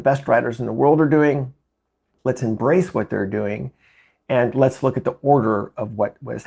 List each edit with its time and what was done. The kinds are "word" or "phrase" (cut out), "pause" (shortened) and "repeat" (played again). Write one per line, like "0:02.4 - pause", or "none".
none

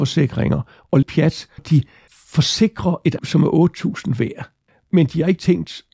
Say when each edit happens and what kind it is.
0:01.0 - word
0:01.6 - word
0:03.2 - word

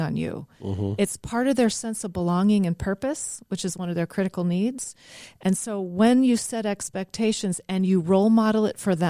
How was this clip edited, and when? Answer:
none

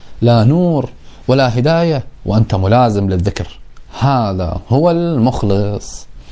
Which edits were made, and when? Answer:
none

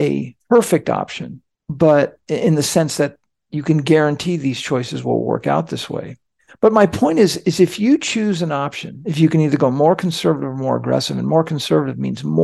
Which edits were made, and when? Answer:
none

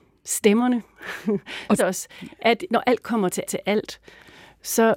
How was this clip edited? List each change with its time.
0:01.8 - phrase
0:02.7 - word
0:03.5 - repeat

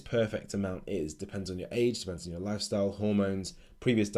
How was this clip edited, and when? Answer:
none

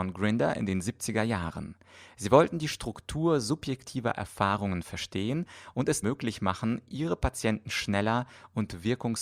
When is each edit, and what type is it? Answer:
0:06.0 - word

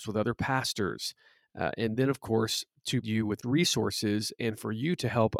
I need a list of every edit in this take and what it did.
0:03.0 - word
0:03.4 - word

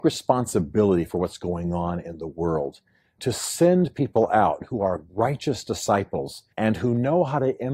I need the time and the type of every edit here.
0:03.2 - word
0:05.1 - pause
0:06.5 - pause

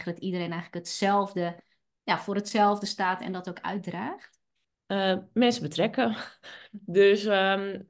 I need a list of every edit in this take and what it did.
none

